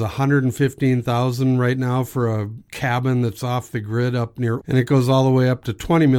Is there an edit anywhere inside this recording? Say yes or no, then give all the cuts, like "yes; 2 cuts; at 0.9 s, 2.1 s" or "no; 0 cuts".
yes; 1 cut; at 4.6 s